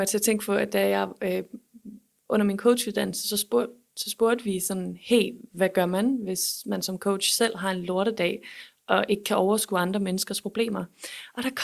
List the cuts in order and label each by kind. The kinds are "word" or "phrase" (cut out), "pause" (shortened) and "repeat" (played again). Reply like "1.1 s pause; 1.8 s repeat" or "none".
none